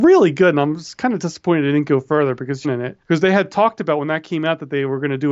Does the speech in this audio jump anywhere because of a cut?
yes; 2 cuts; at 2.6 s, 3.0 s

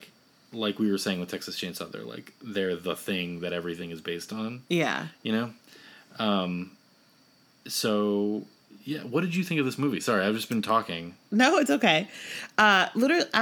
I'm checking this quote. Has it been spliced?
no; 0 cuts

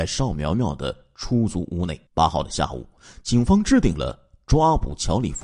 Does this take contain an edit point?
yes; 1 cut; at 2.1 s

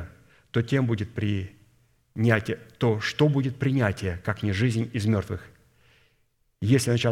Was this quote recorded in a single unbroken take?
yes; 0 cuts

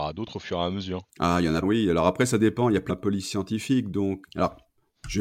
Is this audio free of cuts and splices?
no; 4 cuts; at 1.1 s, 1.6 s, 2.9 s, 4.2 s

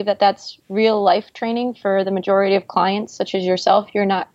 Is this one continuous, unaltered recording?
yes; 0 cuts

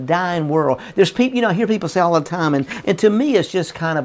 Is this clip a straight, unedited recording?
yes; 0 cuts

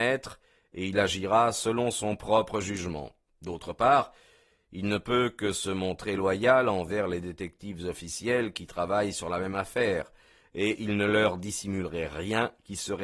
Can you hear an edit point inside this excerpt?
no; 0 cuts

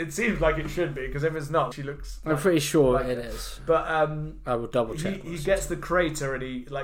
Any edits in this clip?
yes; 1 cut; at 1.7 s

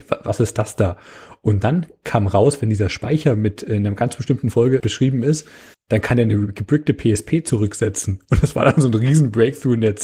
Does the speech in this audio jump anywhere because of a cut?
yes; 2 cuts; at 4.8 s, 5.7 s

